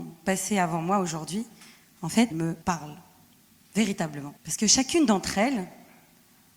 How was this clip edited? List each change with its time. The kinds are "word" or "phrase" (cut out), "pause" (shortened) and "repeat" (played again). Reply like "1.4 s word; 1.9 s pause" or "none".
2.3 s word; 2.6 s pause; 4.4 s pause